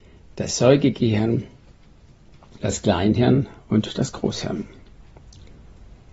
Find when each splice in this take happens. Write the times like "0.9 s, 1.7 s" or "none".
none